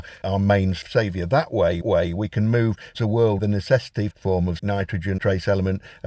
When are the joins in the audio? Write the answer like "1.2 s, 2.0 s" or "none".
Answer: 1.8 s, 2.9 s, 3.4 s, 4.1 s, 4.6 s, 5.2 s